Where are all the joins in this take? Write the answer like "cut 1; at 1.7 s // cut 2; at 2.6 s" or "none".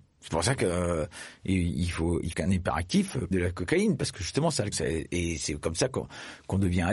cut 1; at 2.3 s // cut 2; at 3.3 s // cut 3; at 4.7 s